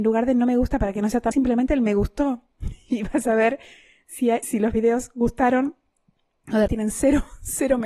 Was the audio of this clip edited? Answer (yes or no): yes